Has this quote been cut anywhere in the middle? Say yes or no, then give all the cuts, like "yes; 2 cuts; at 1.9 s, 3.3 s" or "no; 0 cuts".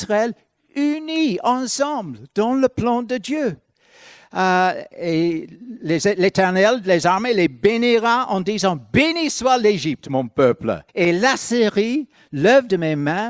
yes; 1 cut; at 10.9 s